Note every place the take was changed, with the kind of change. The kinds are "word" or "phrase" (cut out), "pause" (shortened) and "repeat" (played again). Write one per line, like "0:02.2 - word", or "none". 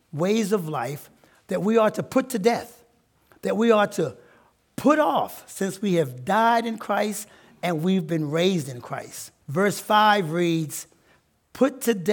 0:09.4 - pause